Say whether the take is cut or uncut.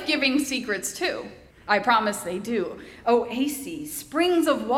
cut